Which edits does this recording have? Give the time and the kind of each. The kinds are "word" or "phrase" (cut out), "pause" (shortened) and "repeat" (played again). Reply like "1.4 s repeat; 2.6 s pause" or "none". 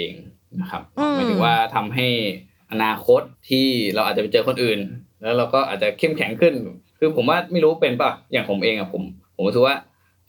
3.3 s pause; 9.2 s pause